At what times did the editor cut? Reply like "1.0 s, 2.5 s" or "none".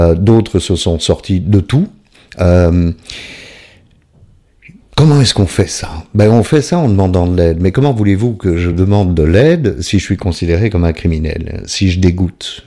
none